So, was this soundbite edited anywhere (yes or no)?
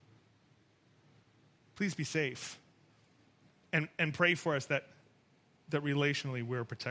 no